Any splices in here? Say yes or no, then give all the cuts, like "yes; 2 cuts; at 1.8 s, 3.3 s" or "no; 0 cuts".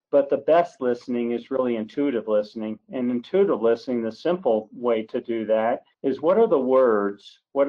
yes; 1 cut; at 5.9 s